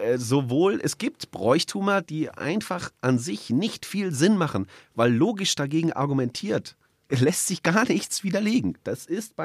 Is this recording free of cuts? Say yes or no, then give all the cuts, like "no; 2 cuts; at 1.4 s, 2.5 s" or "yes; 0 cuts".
no; 1 cut; at 7.0 s